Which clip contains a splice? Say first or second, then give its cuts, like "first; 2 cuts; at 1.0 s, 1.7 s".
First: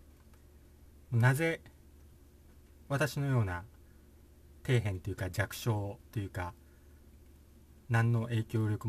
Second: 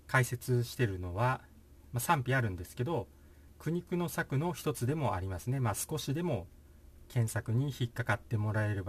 second; 1 cut; at 3.5 s